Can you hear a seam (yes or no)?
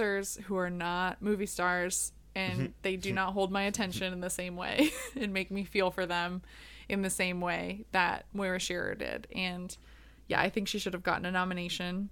no